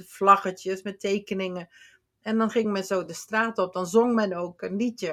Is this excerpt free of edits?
yes; 0 cuts

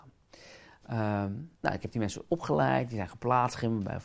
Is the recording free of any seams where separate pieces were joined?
no; 1 cut; at 1.5 s

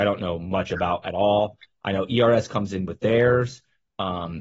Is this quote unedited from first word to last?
yes; 0 cuts

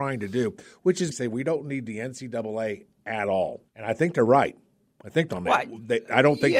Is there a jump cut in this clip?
yes; 3 cuts; at 1.1 s, 3.7 s, 5.3 s

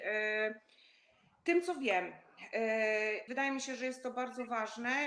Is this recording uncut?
no; 1 cut; at 3.3 s

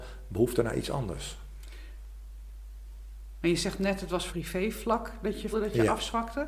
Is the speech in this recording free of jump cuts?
no; 2 cuts; at 4.3 s, 5.5 s

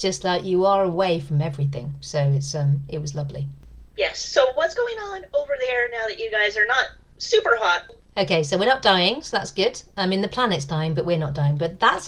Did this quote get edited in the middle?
no; 0 cuts

